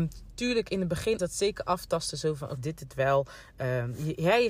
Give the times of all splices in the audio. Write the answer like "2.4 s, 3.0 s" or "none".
1.2 s, 2.6 s